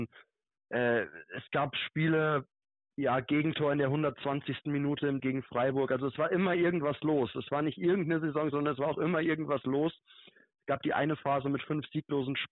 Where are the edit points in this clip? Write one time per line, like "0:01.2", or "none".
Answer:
0:05.2

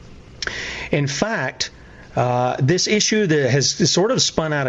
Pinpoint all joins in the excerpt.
none

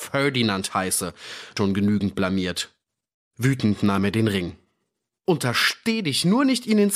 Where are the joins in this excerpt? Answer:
0:01.6

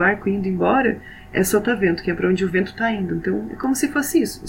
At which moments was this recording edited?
none

